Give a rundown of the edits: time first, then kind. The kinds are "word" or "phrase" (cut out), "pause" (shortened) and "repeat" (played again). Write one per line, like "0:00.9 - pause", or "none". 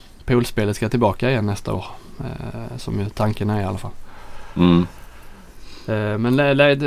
none